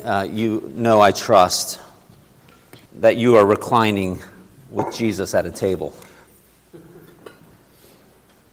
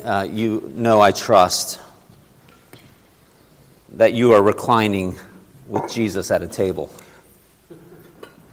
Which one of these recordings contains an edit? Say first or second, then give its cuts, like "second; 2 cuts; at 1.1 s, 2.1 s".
first; 1 cut; at 2.8 s